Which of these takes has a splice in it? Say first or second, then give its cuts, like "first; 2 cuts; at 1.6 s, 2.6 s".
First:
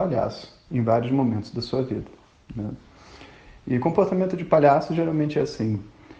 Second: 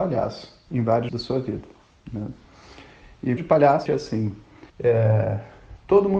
second; 4 cuts; at 1.1 s, 3.4 s, 3.9 s, 4.7 s